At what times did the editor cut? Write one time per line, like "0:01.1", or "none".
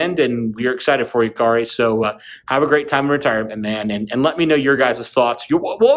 none